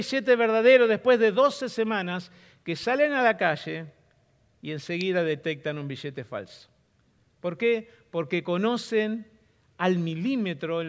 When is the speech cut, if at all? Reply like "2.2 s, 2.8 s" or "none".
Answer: none